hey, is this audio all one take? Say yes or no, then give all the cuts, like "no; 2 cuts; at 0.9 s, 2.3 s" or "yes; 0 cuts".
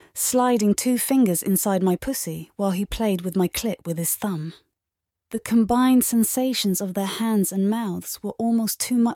yes; 0 cuts